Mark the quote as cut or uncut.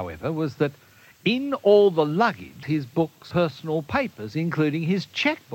cut